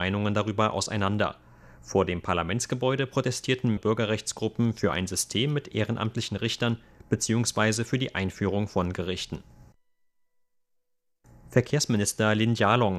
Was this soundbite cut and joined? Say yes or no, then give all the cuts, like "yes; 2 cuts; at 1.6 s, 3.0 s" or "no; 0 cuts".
yes; 2 cuts; at 3.8 s, 8.9 s